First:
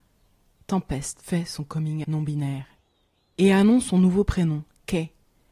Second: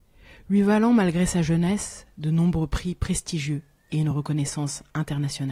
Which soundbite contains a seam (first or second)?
first